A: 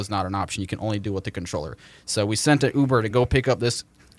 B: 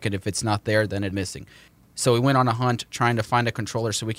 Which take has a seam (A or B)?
B